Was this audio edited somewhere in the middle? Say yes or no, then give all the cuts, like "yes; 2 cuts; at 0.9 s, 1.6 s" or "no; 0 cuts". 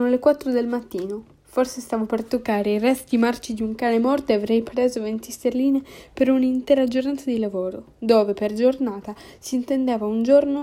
yes; 1 cut; at 4.6 s